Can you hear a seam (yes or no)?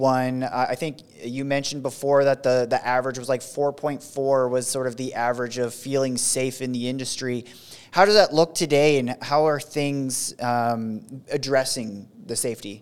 no